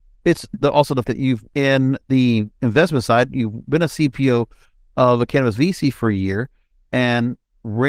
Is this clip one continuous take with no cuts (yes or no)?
no